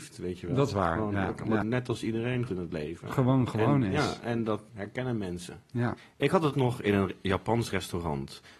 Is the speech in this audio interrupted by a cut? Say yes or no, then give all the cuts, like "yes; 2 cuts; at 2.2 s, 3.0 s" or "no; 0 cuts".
yes; 4 cuts; at 1.6 s, 2.5 s, 4.7 s, 6.5 s